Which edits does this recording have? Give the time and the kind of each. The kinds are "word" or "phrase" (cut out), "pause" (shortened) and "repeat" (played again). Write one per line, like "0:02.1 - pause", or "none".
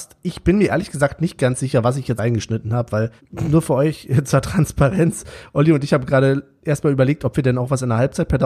0:02.2 - word
0:03.2 - pause